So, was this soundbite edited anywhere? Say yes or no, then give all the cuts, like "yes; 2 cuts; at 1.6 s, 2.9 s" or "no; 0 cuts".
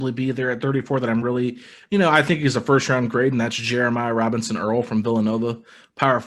no; 0 cuts